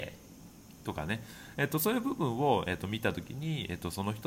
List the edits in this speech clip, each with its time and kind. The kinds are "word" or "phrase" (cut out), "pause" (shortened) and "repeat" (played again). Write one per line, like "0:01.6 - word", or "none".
none